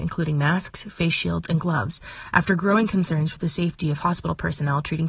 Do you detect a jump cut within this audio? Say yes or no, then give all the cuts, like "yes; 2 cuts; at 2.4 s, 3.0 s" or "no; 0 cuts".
no; 0 cuts